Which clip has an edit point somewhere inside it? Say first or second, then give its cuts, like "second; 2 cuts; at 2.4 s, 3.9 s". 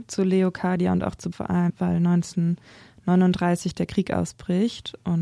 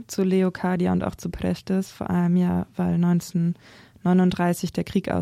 first; 2 cuts; at 1.3 s, 1.7 s